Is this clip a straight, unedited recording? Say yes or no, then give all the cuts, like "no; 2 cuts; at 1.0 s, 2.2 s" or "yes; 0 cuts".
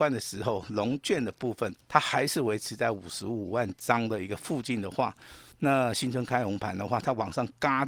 no; 2 cuts; at 1.8 s, 5.5 s